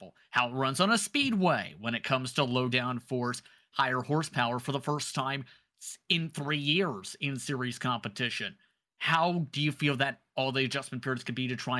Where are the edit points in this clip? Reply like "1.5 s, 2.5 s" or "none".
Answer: none